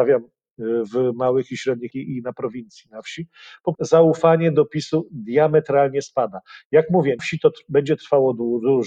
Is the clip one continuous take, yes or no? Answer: no